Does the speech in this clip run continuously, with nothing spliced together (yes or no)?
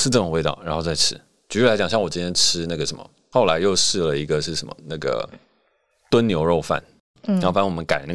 yes